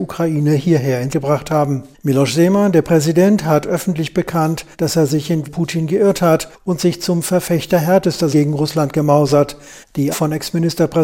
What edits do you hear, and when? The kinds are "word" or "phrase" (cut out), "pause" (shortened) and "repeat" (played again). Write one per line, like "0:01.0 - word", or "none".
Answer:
0:01.1 - word
0:04.7 - pause
0:05.4 - word
0:08.3 - word
0:10.1 - word